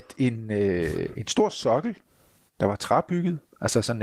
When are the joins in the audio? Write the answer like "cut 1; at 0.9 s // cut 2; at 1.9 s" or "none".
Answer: none